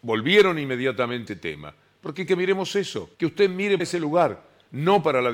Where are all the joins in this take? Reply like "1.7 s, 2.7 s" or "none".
1.3 s, 2.3 s, 3.1 s, 3.8 s